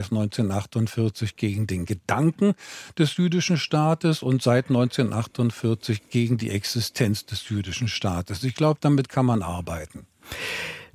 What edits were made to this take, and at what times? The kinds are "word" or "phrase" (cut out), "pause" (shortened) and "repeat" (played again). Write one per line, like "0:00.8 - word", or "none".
none